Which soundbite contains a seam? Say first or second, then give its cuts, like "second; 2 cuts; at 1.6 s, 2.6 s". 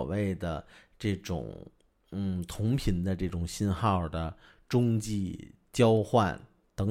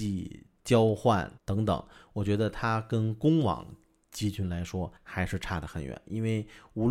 second; 2 cuts; at 1.4 s, 5.0 s